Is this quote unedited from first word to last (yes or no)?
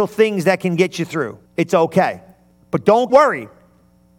no